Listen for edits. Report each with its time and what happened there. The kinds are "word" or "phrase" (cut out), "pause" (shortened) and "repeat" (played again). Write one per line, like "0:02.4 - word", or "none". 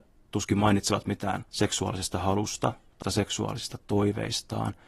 0:01.5 - pause
0:03.0 - word

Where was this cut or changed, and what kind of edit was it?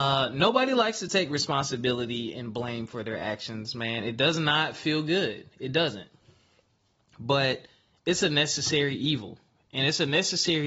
none

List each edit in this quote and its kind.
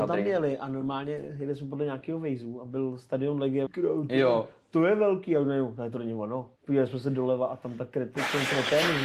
0:03.7 - phrase
0:06.6 - pause

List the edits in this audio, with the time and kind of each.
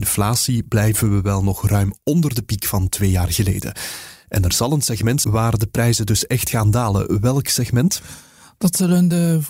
0:05.2 - word

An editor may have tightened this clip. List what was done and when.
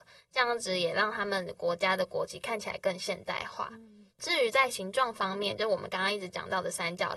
0:04.1 - pause

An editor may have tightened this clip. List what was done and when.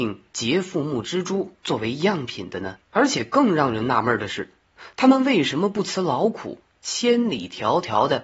0:02.8 - pause

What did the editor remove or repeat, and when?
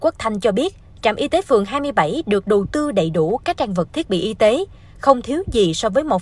0:03.9 - word

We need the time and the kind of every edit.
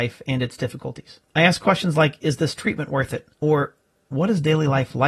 0:01.3 - pause
0:03.3 - pause

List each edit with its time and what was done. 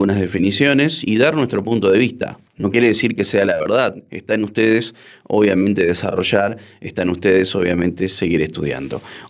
0:02.5 - pause

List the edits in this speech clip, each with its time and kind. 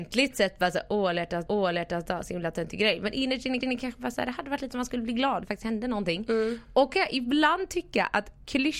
0:01.5 - repeat
0:03.6 - repeat
0:04.7 - word
0:05.4 - word
0:06.9 - word

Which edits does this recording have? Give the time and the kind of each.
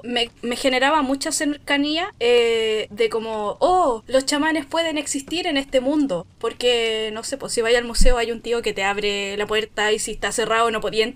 none

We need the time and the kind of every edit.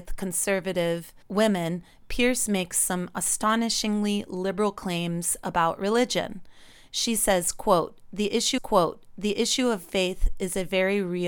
0:08.6 - repeat

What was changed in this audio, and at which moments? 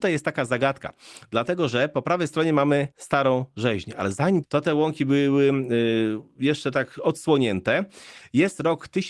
0:02.9 - pause
0:04.4 - phrase

